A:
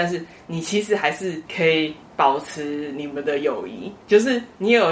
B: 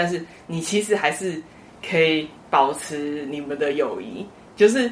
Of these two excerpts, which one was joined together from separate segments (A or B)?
A